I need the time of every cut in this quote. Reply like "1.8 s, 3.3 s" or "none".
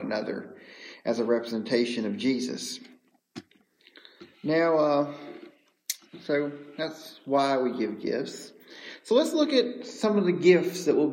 4.3 s